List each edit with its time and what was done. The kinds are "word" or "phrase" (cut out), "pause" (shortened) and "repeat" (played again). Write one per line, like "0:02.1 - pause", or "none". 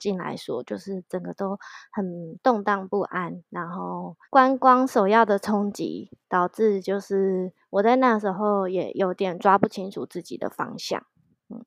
0:04.2 - pause

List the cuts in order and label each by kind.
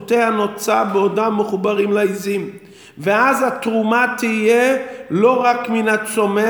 none

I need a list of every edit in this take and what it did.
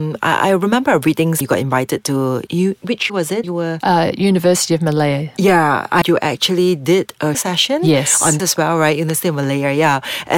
0:01.4 - word
0:02.5 - word
0:03.1 - word
0:03.4 - word
0:06.0 - word
0:07.3 - word
0:08.4 - word

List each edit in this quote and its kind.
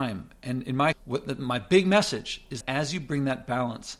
0:00.9 - word
0:02.6 - word

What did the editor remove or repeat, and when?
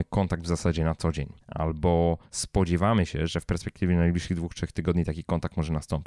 0:01.4 - pause

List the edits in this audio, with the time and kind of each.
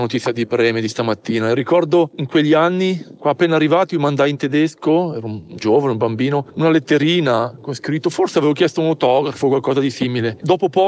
none

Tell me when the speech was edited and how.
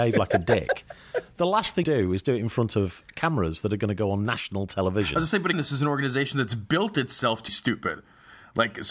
0:01.8 - word
0:05.5 - word
0:07.5 - word

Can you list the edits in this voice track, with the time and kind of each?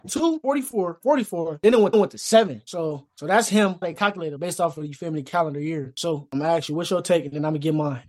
0:01.0 - word
0:01.9 - repeat
0:03.8 - phrase
0:04.4 - word

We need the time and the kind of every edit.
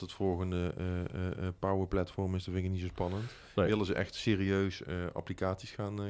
none

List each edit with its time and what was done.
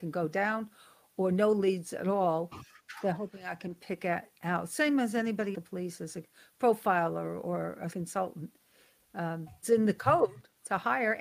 0:05.5 - phrase
0:07.9 - word
0:09.6 - word

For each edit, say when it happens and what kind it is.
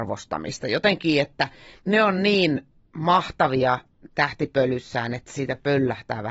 none

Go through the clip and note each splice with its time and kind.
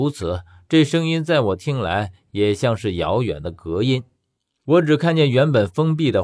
none

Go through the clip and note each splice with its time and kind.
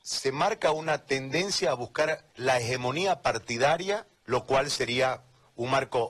0:02.3 - pause
0:04.2 - pause

